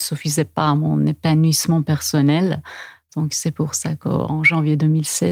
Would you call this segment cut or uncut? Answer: uncut